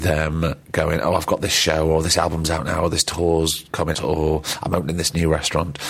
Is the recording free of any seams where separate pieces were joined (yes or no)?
no